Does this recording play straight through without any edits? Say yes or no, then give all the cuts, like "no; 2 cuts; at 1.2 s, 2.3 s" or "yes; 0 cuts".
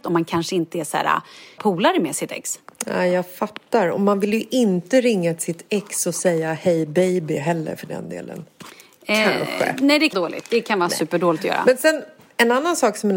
no; 2 cuts; at 1.6 s, 10.1 s